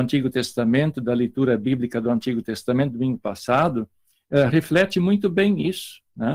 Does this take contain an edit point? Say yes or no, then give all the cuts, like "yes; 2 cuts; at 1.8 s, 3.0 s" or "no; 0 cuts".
no; 0 cuts